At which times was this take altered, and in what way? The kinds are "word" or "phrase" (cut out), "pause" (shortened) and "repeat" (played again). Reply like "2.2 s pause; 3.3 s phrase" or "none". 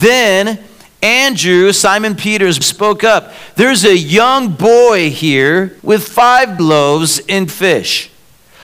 2.6 s word; 5.8 s pause; 6.6 s word; 7.5 s word